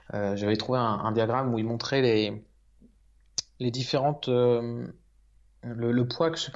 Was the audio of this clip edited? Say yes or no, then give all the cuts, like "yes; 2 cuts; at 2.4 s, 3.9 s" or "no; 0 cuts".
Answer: no; 0 cuts